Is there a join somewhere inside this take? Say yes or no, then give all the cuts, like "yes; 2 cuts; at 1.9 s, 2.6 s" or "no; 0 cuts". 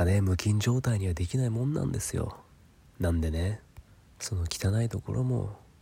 no; 0 cuts